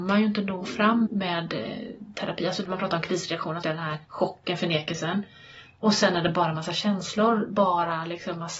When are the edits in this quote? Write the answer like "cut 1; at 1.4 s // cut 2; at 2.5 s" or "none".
cut 1; at 1.1 s // cut 2; at 3.6 s // cut 3; at 4.0 s